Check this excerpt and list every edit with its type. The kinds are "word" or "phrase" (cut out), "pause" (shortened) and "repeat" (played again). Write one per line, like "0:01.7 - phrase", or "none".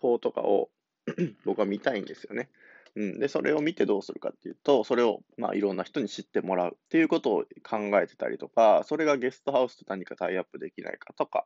0:05.3 - pause
0:06.9 - pause